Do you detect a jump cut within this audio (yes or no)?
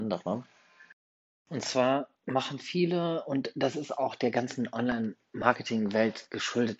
yes